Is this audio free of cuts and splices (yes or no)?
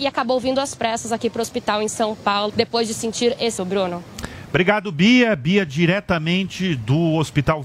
no